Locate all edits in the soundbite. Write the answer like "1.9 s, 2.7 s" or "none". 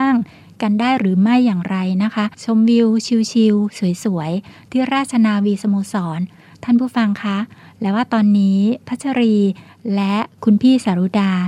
2.3 s

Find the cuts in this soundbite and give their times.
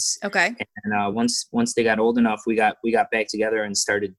none

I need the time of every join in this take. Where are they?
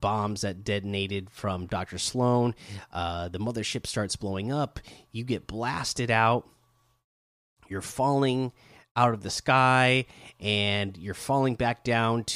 none

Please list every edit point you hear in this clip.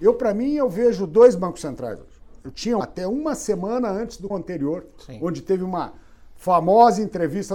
2.8 s, 4.3 s

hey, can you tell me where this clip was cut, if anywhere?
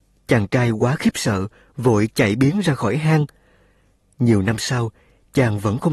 none

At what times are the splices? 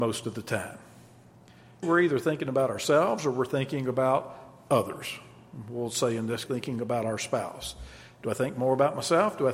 1.8 s, 6.5 s

